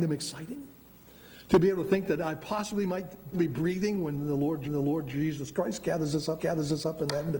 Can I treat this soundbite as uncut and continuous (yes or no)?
no